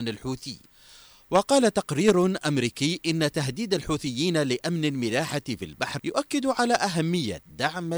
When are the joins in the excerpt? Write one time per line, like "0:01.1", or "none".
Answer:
0:06.0